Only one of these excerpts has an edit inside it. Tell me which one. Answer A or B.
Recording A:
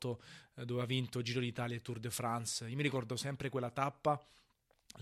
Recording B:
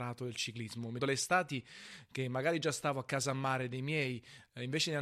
B